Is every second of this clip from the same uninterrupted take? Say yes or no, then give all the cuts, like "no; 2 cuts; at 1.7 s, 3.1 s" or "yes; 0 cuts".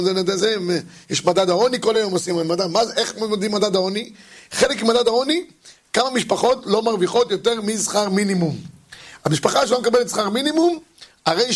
yes; 0 cuts